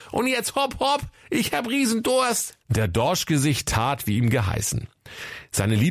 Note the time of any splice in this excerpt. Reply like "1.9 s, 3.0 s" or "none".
2.6 s